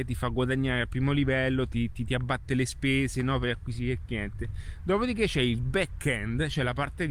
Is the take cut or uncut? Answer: uncut